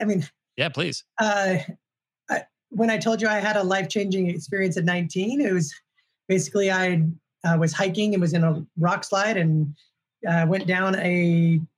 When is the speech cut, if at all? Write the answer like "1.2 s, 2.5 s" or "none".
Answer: none